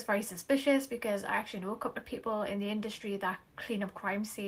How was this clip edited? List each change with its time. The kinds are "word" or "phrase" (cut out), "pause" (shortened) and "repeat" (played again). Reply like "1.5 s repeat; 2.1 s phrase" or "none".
none